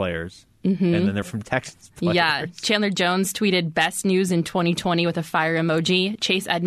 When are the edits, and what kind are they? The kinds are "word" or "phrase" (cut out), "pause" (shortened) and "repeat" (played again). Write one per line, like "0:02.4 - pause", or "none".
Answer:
0:01.2 - word